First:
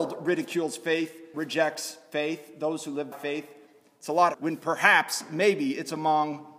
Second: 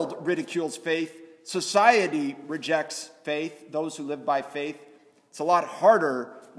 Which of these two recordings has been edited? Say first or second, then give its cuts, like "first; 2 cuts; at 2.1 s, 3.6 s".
first; 3 cuts; at 1.3 s, 3.1 s, 4.3 s